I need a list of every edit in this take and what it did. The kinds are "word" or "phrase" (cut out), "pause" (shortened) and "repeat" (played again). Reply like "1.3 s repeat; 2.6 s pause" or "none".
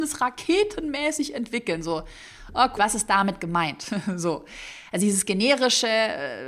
2.8 s word